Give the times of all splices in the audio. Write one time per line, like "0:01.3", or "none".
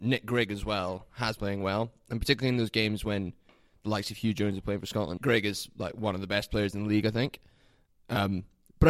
0:01.4
0:05.2